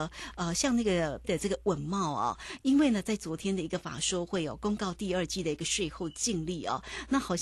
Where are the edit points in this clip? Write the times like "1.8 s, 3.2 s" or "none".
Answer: 1.2 s